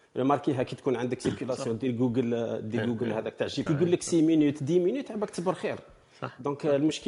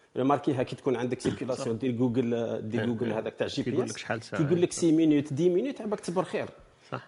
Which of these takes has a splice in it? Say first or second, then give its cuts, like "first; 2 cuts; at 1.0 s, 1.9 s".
first; 1 cut; at 3.7 s